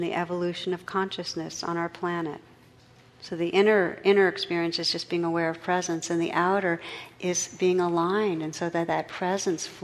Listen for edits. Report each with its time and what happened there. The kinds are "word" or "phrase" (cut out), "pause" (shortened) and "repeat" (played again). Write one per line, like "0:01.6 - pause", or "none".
none